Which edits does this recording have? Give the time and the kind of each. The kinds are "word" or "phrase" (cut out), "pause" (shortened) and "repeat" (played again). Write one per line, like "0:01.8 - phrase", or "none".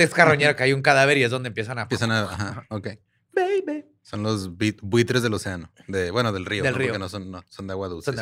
none